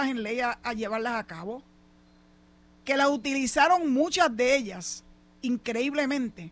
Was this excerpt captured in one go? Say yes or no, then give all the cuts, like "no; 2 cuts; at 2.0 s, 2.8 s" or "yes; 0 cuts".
yes; 0 cuts